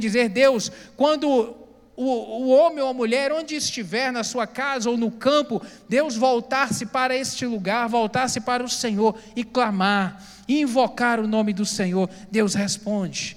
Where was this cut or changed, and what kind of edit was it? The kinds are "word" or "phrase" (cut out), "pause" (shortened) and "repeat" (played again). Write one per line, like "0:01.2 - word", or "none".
none